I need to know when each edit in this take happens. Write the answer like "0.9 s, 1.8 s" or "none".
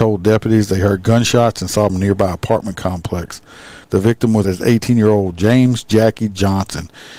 1.9 s, 3.8 s, 4.4 s